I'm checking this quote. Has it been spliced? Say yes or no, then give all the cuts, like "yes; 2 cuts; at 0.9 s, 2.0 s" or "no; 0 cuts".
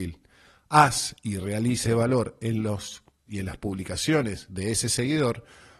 yes; 2 cuts; at 1.9 s, 3.3 s